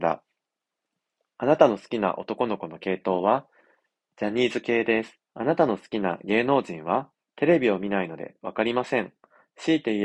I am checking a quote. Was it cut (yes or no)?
yes